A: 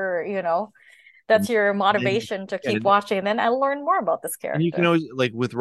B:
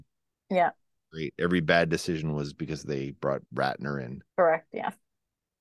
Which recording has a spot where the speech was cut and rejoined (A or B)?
B